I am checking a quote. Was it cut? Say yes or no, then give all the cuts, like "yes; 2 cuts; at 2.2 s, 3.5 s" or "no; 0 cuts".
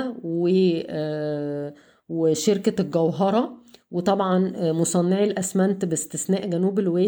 no; 0 cuts